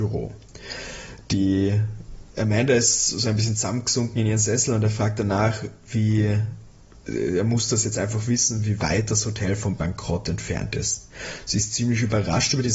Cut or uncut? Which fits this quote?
cut